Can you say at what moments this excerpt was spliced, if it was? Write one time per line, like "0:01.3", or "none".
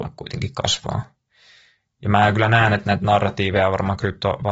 none